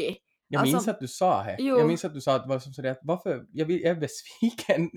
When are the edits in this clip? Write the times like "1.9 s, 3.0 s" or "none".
none